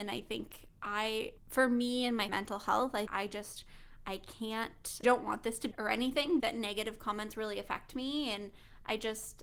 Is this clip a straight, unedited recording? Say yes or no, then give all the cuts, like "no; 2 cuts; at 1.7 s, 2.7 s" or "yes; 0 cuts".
no; 6 cuts; at 1.4 s, 2.3 s, 3.1 s, 5.0 s, 5.7 s, 6.4 s